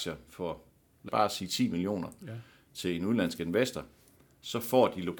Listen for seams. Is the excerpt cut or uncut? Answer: cut